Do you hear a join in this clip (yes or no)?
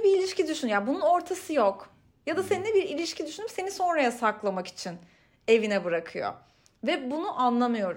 no